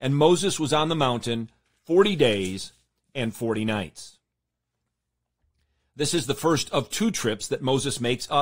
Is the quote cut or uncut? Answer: uncut